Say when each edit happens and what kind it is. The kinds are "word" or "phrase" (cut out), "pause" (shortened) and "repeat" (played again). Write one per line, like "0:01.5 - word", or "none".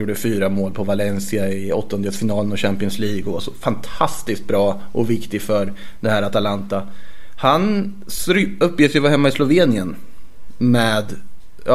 none

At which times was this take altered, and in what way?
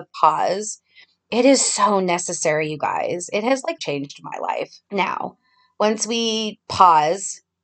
0:03.8 - word
0:04.8 - pause

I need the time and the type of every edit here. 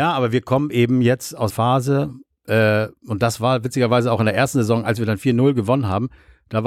0:01.5 - word

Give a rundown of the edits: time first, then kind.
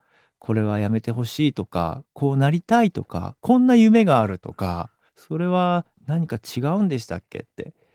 0:05.1 - pause
0:05.9 - pause

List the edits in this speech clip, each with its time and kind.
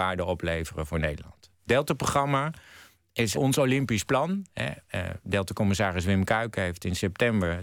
0:03.3 - word

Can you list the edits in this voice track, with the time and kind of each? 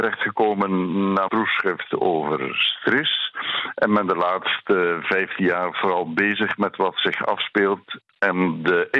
0:01.3 - word

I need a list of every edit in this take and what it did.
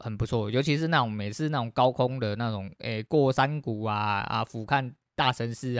none

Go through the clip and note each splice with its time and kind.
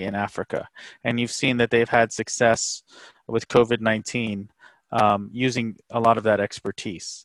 none

